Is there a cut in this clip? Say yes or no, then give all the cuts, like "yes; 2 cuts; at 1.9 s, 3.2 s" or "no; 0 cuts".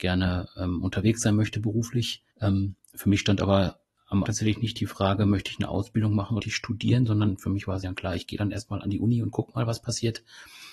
yes; 4 cuts; at 2.3 s, 4.3 s, 6.4 s, 7.8 s